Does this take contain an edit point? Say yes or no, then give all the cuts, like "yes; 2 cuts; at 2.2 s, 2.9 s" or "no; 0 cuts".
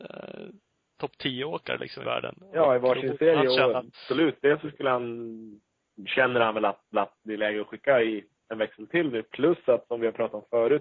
yes; 3 cuts; at 2.0 s, 3.9 s, 6.9 s